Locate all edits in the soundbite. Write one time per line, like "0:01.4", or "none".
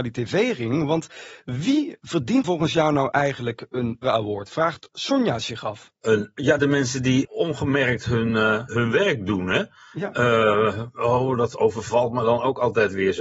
0:02.4
0:04.0
0:06.0
0:06.6
0:07.2
0:08.7